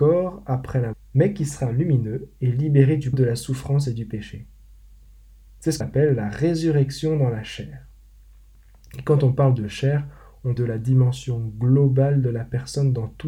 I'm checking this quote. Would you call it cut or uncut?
cut